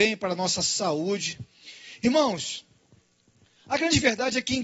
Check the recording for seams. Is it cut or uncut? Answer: uncut